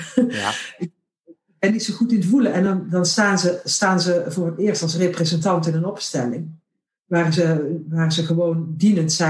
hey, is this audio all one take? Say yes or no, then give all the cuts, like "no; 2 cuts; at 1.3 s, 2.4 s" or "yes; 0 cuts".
yes; 0 cuts